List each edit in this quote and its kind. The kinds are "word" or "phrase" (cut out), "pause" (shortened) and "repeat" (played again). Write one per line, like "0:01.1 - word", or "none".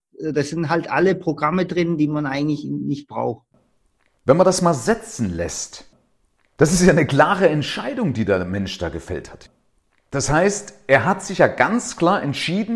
none